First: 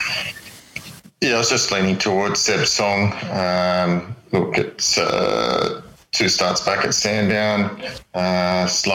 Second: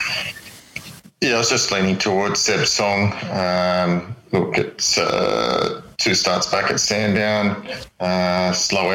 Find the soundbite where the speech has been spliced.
second; 1 cut; at 5.9 s

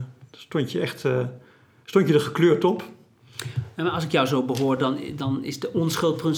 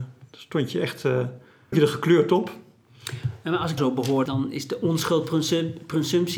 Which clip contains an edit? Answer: second; 3 cuts; at 1.7 s, 3.8 s, 4.3 s

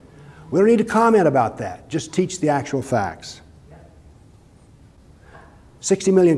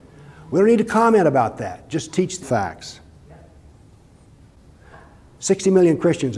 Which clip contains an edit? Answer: second; 1 cut; at 2.4 s

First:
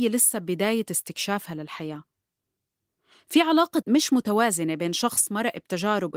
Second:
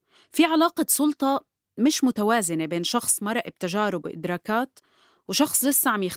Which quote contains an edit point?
first; 1 cut; at 3.8 s

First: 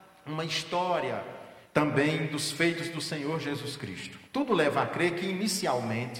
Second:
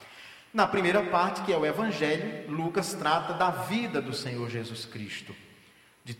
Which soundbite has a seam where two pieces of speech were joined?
first; 2 cuts; at 1.6 s, 4.2 s

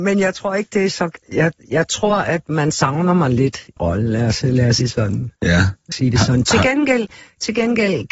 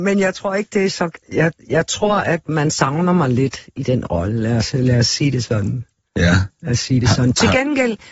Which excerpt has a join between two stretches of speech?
first; 4 cuts; at 3.8 s, 4.8 s, 5.4 s, 5.9 s

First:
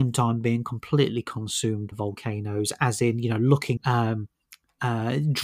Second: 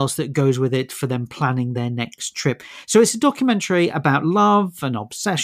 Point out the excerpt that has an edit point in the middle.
first; 2 cuts; at 1.9 s, 3.8 s

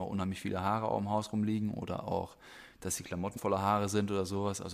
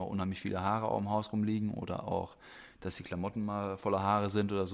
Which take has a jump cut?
first; 1 cut; at 3.4 s

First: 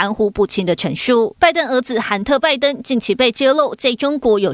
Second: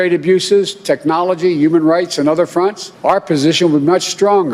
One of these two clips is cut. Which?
second; 1 cut; at 2.9 s

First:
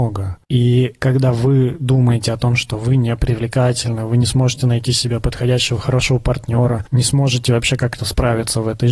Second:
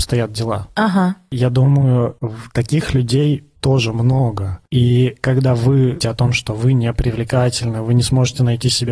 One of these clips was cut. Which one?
second; 2 cuts; at 3.6 s, 6.0 s

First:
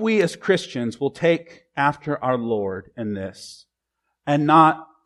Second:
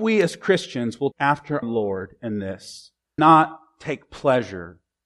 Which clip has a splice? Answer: second; 3 cuts; at 1.1 s, 1.6 s, 3.2 s

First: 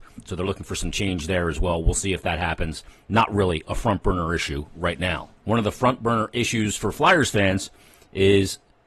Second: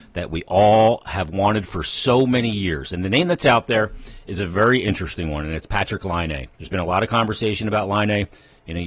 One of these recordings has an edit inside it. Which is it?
second; 1 cut; at 6.5 s

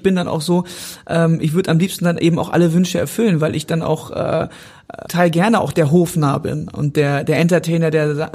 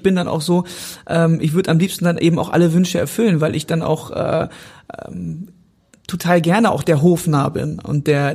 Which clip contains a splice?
first; 1 cut; at 5.1 s

